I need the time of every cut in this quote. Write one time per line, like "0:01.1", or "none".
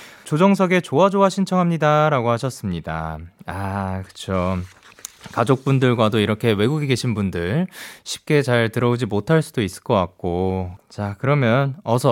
none